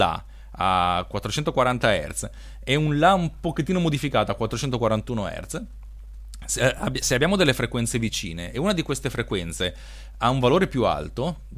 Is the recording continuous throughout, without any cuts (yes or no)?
yes